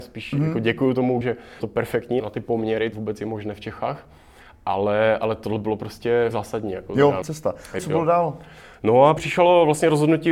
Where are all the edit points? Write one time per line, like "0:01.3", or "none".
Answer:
0:01.2
0:01.6
0:02.2
0:02.9
0:06.3
0:07.2
0:07.8
0:09.2